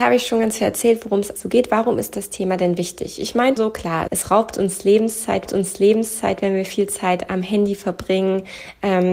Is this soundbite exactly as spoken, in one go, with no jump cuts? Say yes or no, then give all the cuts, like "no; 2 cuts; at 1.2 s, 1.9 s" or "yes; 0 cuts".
no; 4 cuts; at 1.4 s, 3.6 s, 4.1 s, 5.5 s